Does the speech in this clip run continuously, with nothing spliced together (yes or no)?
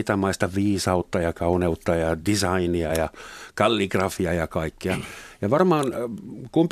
yes